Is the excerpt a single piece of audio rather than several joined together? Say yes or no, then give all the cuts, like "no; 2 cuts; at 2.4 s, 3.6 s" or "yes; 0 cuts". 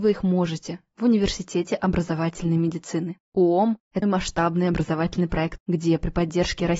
no; 2 cuts; at 4.0 s, 5.6 s